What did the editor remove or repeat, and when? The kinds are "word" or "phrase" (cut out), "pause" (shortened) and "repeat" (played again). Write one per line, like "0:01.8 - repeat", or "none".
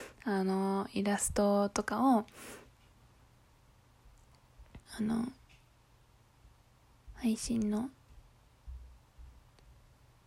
0:04.9 - pause